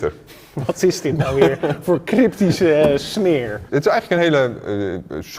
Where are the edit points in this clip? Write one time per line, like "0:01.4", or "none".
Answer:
none